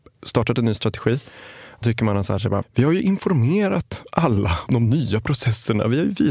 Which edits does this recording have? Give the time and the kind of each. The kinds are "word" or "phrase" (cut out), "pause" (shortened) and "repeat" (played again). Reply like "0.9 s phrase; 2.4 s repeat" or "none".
1.8 s word; 2.6 s word; 4.7 s word